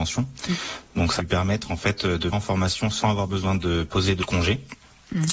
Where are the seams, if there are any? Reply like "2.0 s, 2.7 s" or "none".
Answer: 1.2 s, 2.3 s, 4.2 s